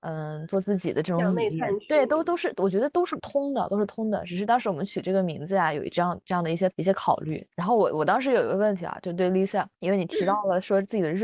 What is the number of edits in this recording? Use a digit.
0